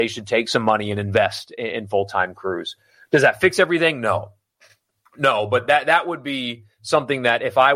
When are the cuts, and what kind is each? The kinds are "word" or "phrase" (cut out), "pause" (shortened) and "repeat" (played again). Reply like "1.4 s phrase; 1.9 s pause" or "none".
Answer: none

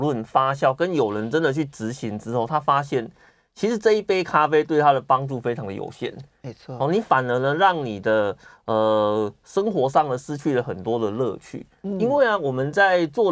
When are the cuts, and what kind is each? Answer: none

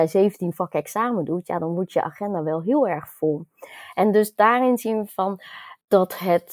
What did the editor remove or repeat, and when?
none

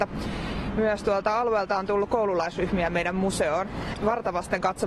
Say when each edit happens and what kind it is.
none

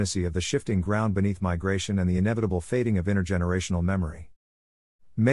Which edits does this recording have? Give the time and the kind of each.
none

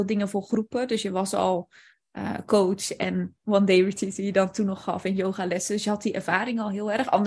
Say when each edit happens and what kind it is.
none

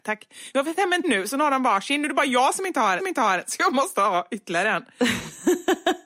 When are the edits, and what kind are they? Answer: 1.0 s word; 3.0 s repeat

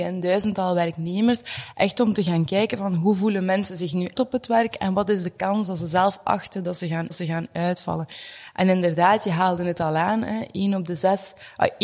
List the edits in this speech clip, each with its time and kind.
4.1 s word; 7.1 s repeat

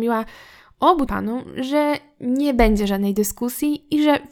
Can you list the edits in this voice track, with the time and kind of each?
1.1 s word

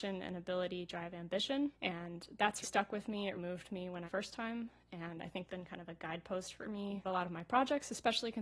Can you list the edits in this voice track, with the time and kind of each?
1.7 s pause; 2.6 s word; 3.4 s word; 4.1 s phrase; 5.5 s word; 7.0 s word

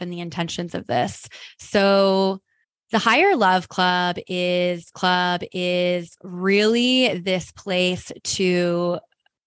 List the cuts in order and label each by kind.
2.6 s pause; 4.9 s repeat

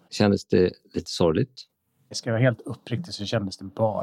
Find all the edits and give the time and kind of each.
none

